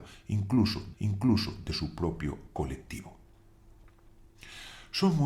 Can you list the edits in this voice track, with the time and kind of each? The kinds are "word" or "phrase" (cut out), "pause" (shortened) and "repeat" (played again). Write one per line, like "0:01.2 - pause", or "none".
0:00.9 - repeat